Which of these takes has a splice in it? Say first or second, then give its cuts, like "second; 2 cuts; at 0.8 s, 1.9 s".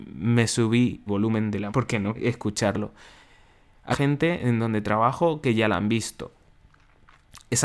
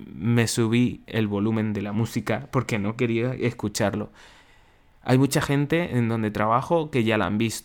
first; 4 cuts; at 1.1 s, 1.7 s, 2.1 s, 3.9 s